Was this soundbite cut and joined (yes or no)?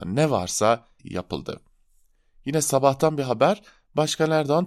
yes